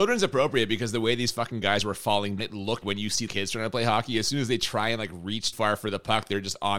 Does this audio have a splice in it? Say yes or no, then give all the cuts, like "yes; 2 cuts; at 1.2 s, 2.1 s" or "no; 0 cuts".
yes; 4 cuts; at 2.4 s, 2.8 s, 3.3 s, 5.5 s